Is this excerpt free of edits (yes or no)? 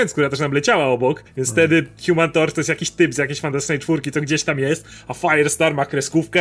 no